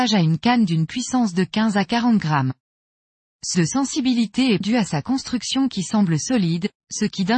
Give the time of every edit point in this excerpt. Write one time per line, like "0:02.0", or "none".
0:03.5
0:04.6